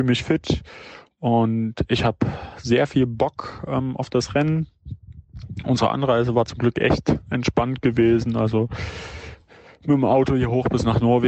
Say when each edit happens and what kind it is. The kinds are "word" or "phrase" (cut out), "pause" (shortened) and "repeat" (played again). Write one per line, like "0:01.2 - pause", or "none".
none

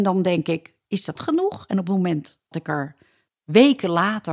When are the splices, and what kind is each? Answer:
0:01.2 - word
0:02.5 - word

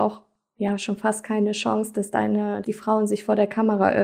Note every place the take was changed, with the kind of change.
0:02.6 - word

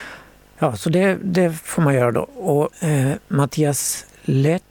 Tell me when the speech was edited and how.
0:02.7 - pause

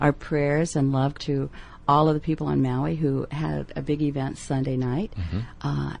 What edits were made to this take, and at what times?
0:01.2 - word

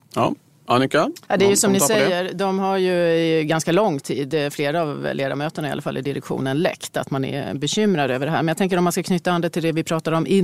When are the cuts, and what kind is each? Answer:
0:01.2 - pause

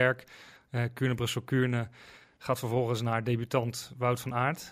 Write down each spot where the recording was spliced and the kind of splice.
none

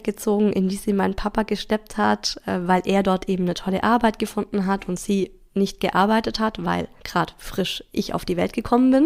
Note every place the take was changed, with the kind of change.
0:07.0 - pause

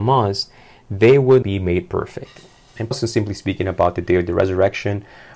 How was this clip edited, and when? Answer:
0:01.4 - word
0:02.9 - word

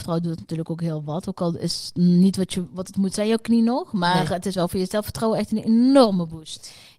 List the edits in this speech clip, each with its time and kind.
none

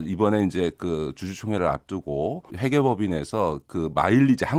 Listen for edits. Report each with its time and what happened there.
0:02.5 - word

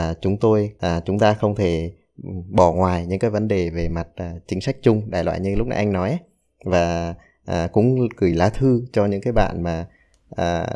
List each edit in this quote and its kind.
none

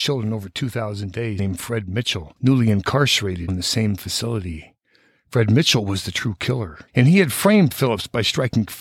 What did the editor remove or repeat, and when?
0:01.4 - phrase
0:02.4 - pause
0:03.5 - word
0:06.9 - pause

